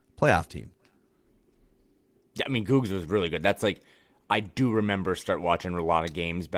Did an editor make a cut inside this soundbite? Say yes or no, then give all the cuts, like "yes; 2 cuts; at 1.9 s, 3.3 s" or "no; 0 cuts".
no; 0 cuts